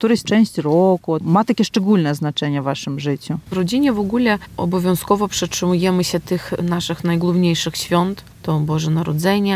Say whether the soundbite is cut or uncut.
uncut